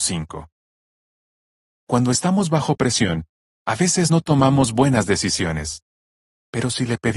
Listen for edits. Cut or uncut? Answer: uncut